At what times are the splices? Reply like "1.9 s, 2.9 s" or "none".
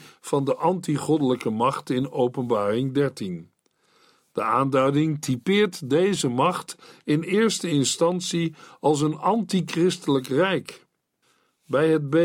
none